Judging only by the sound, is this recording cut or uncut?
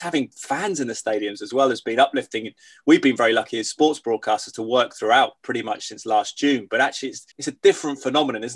cut